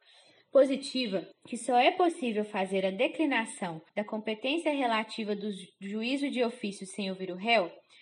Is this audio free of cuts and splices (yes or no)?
no